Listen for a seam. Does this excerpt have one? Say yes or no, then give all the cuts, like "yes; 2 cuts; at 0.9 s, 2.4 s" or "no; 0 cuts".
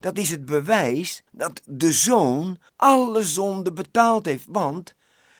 yes; 2 cuts; at 1.3 s, 2.7 s